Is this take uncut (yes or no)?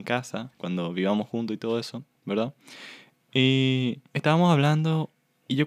no